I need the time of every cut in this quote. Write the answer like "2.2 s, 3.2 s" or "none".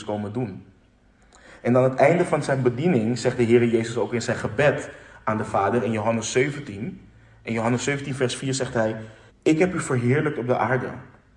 9.3 s